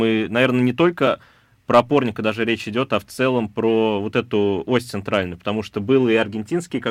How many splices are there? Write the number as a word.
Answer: zero